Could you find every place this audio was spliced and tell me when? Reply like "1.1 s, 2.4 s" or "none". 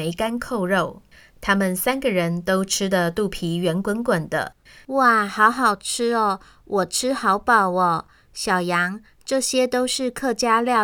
none